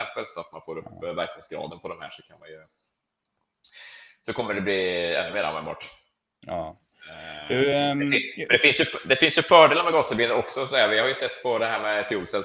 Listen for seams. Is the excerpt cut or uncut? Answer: uncut